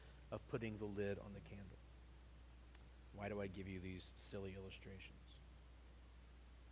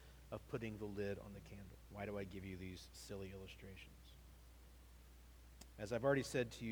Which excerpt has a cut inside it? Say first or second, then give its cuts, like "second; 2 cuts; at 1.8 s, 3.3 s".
second; 2 cuts; at 1.8 s, 5.7 s